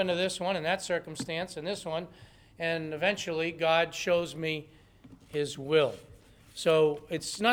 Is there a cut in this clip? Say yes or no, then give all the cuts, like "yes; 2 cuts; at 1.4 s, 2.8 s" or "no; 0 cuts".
no; 0 cuts